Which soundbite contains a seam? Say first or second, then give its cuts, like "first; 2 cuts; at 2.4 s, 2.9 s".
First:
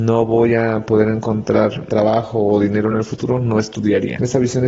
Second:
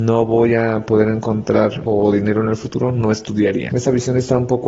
second; 1 cut; at 1.9 s